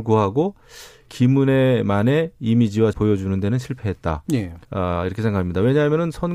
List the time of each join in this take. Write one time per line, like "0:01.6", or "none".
0:01.1
0:02.9
0:04.6

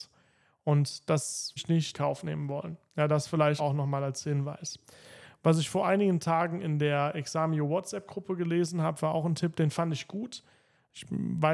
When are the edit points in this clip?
0:01.6
0:01.9
0:03.6

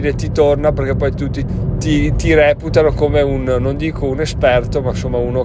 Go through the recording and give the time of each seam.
0:01.5

